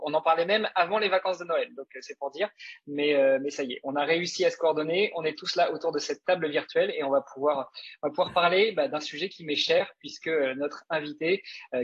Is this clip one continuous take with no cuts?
yes; 0 cuts

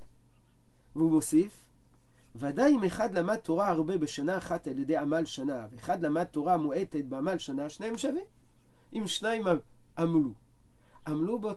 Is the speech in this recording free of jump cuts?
yes; 0 cuts

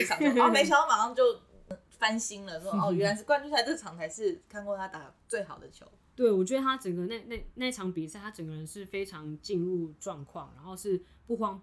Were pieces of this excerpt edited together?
no; 0 cuts

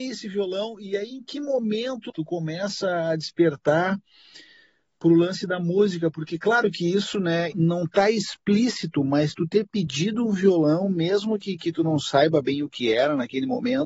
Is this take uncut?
no; 2 cuts; at 2.1 s, 7.5 s

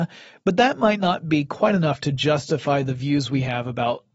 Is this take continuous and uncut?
yes; 0 cuts

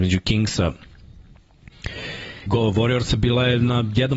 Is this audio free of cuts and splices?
no; 1 cut; at 2.5 s

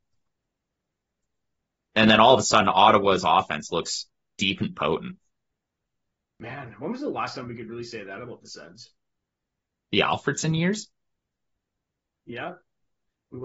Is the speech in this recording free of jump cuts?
yes; 0 cuts

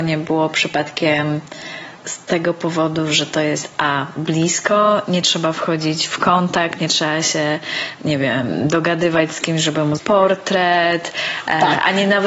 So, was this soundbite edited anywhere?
yes; 2 cuts; at 2.0 s, 10.0 s

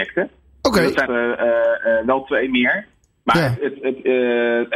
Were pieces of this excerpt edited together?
yes; 1 cut; at 1.1 s

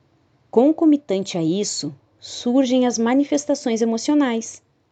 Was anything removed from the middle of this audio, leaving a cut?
no; 0 cuts

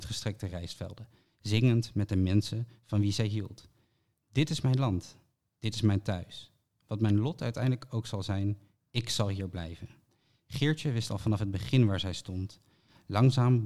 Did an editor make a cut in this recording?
no; 0 cuts

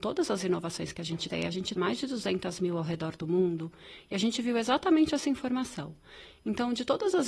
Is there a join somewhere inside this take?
yes; 2 cuts; at 1.3 s, 1.8 s

